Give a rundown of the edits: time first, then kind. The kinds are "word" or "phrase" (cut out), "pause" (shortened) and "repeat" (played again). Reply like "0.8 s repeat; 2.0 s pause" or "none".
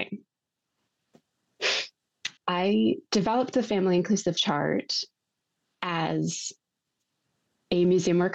2.4 s pause; 4.4 s word